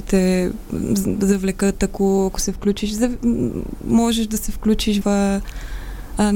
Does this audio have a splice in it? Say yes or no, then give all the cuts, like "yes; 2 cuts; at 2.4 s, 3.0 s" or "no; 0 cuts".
yes; 1 cut; at 5.0 s